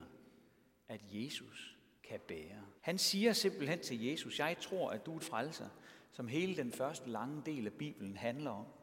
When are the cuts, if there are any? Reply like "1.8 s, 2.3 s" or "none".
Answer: 2.0 s, 2.8 s, 5.2 s